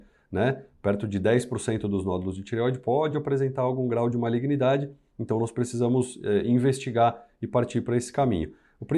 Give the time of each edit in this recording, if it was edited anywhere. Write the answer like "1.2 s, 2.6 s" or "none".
none